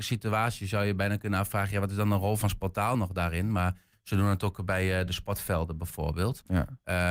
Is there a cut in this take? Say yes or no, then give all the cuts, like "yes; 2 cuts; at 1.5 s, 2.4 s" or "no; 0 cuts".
no; 0 cuts